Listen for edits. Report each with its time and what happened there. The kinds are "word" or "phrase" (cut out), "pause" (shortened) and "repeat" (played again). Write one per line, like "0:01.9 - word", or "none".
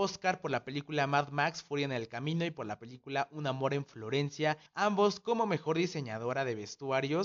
0:04.7 - pause